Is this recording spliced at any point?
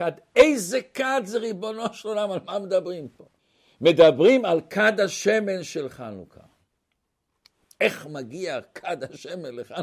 yes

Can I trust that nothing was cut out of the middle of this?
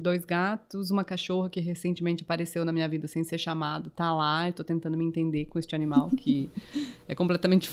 yes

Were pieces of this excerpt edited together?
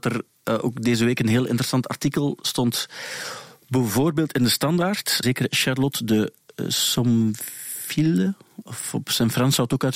yes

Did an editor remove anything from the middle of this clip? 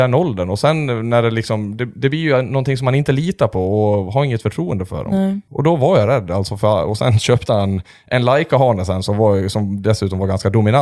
no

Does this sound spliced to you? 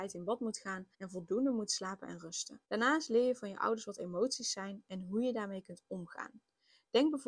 yes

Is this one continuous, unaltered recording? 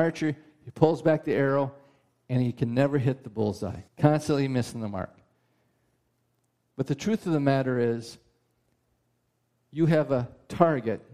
no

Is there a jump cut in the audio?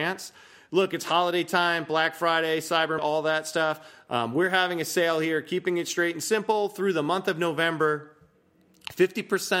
yes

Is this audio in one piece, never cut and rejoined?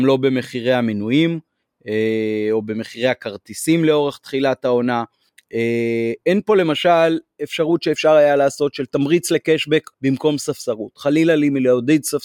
no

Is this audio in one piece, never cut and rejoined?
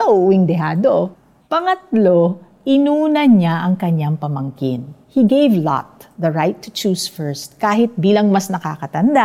no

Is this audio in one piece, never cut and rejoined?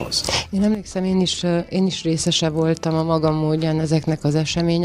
yes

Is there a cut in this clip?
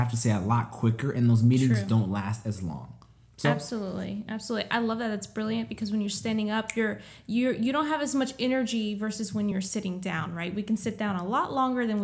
no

